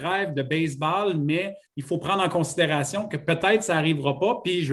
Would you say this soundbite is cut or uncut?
cut